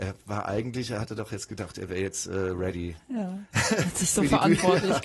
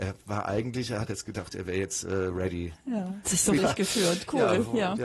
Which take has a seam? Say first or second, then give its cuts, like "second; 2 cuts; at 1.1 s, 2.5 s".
second; 3 cuts; at 1.1 s, 3.2 s, 3.6 s